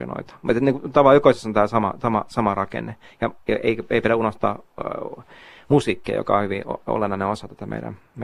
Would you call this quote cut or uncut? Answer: uncut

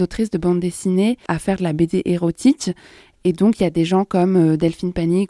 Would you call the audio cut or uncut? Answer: cut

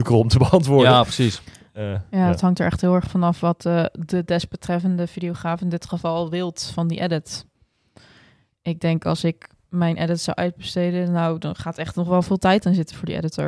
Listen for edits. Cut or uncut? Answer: uncut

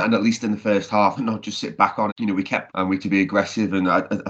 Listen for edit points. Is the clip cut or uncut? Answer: cut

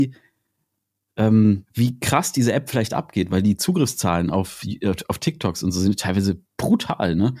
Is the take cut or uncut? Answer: cut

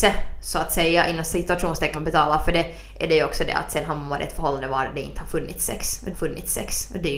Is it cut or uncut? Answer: cut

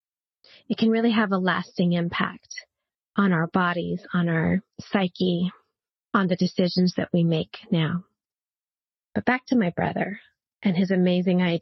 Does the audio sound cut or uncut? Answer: uncut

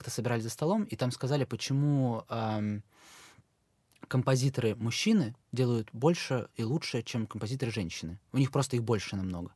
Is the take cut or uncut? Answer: cut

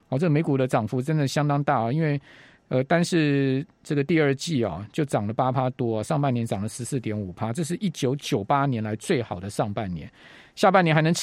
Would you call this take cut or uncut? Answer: uncut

